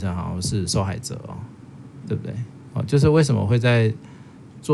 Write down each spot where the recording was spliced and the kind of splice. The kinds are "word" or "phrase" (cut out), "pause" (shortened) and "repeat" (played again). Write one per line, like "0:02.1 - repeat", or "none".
0:02.0 - word